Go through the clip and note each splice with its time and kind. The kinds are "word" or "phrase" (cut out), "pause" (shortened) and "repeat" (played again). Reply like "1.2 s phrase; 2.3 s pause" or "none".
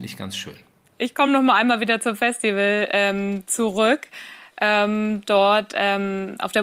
none

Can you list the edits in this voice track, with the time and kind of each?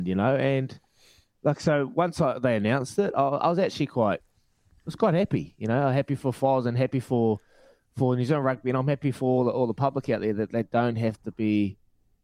none

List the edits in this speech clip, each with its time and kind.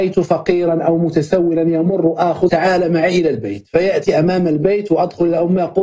2.5 s word

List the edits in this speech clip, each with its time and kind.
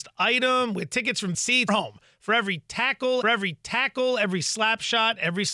1.3 s word; 1.7 s word; 3.2 s repeat

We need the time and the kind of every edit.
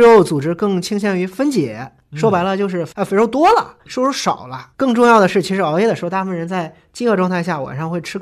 3.9 s word

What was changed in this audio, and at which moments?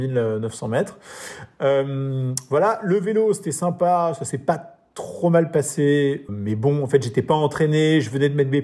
6.3 s word

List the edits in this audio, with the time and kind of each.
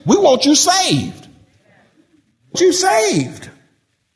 2.5 s word

